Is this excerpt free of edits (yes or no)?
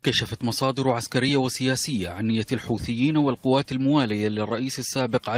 yes